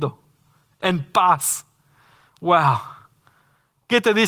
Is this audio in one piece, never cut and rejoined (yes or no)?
yes